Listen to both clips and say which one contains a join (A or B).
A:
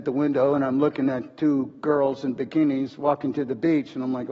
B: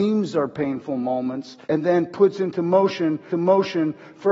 B